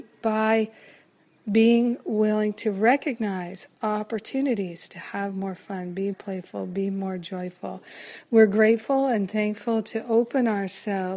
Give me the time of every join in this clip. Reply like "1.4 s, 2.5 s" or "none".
6.1 s